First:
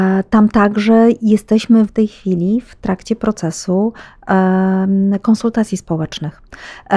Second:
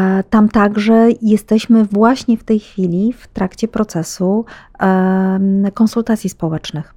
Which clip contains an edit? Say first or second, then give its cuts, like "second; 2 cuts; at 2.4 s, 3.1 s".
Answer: first; 1 cut; at 1.9 s